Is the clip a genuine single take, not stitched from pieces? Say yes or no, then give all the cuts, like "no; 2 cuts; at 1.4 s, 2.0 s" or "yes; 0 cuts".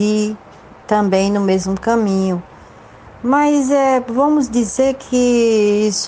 yes; 0 cuts